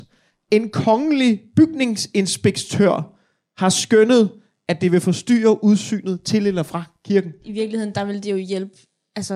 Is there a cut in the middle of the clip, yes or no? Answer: no